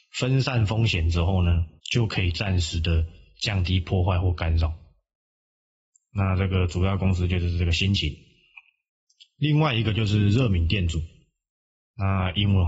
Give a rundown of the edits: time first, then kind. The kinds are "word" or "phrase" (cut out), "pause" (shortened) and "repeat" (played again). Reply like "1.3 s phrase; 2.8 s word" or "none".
1.8 s pause